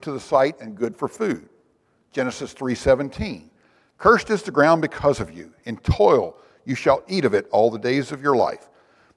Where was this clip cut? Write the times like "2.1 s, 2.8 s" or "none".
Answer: none